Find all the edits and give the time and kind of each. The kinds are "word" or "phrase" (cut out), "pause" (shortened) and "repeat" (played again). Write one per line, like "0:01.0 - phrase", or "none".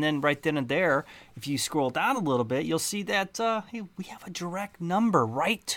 none

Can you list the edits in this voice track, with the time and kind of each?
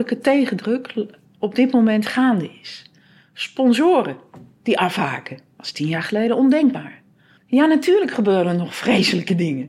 0:05.5 - pause
0:07.4 - pause

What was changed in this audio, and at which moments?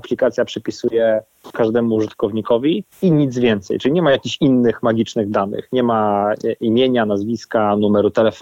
0:02.9 - pause

